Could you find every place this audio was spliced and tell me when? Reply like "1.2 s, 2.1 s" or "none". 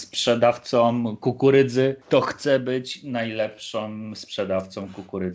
2.0 s